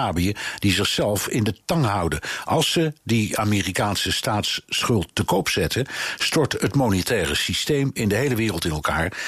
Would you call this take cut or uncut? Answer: uncut